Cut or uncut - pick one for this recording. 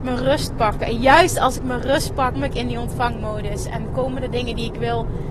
cut